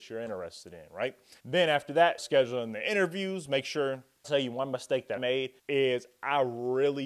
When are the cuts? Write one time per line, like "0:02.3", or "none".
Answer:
0:01.4
0:02.2
0:04.2
0:05.2
0:05.6

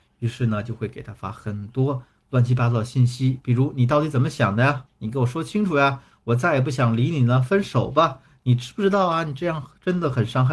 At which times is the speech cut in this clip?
none

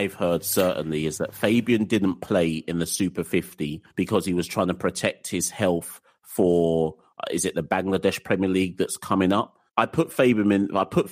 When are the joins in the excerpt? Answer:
0:03.9
0:09.7

